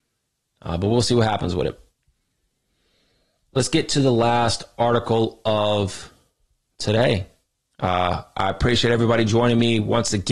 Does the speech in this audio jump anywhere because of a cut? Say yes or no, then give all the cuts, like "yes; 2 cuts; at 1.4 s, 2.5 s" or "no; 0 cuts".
no; 0 cuts